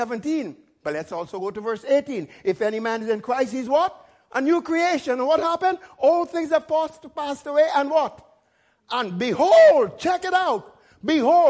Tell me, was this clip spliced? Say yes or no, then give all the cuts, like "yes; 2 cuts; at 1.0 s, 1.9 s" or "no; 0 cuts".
no; 0 cuts